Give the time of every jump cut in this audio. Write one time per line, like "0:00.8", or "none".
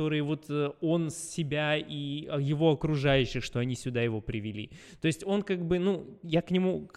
none